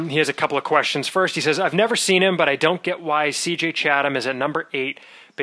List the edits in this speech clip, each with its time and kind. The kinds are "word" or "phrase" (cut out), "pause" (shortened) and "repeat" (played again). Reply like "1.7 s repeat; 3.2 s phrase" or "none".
none